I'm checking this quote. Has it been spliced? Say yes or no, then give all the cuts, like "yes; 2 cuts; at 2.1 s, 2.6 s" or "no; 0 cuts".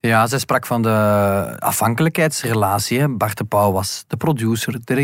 no; 0 cuts